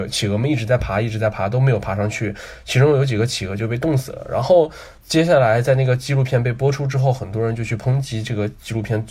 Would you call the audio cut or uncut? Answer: cut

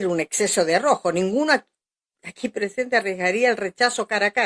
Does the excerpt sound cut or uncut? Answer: uncut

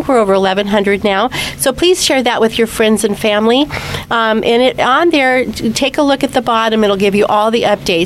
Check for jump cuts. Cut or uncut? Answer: uncut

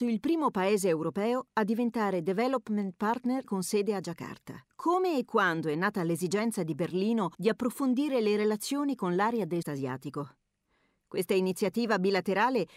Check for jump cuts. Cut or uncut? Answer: cut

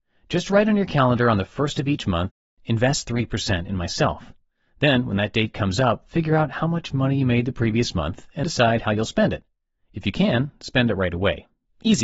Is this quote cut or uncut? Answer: cut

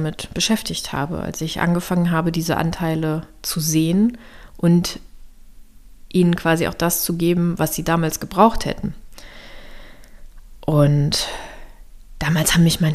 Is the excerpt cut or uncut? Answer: uncut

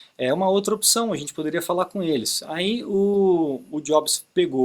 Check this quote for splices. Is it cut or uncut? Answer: uncut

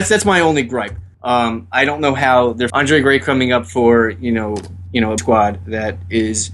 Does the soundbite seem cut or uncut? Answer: cut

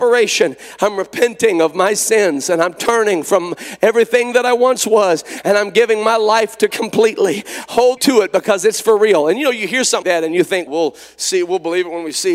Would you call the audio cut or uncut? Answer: cut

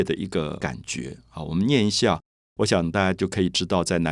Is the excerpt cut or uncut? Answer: uncut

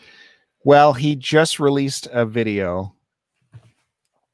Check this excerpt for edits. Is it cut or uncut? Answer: uncut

